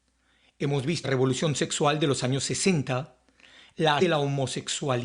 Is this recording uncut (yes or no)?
no